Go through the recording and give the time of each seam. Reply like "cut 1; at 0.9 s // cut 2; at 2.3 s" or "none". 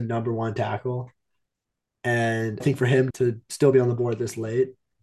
cut 1; at 2.6 s // cut 2; at 3.1 s